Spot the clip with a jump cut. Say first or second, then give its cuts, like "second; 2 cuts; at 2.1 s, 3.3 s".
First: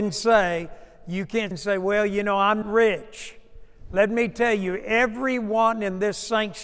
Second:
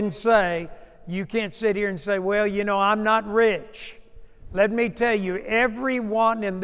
first; 2 cuts; at 1.5 s, 2.6 s